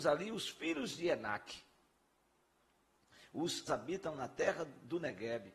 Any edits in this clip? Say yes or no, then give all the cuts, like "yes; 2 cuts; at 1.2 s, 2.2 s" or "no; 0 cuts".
yes; 1 cut; at 3.7 s